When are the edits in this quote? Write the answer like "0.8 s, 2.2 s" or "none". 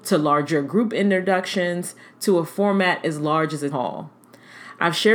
3.7 s